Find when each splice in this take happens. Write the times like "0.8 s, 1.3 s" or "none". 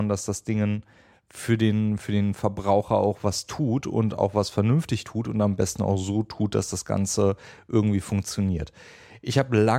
none